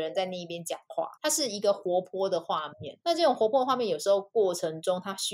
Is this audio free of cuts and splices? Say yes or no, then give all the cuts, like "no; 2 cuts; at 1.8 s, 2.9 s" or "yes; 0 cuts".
no; 2 cuts; at 1.2 s, 3.0 s